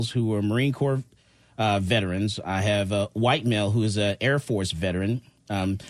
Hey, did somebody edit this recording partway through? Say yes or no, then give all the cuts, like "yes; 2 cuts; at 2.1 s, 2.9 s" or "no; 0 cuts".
no; 0 cuts